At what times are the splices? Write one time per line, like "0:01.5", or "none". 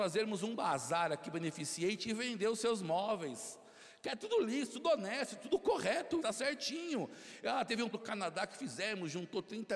0:06.2
0:07.9